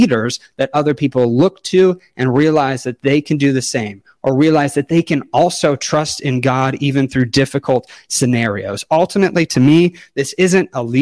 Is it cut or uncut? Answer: uncut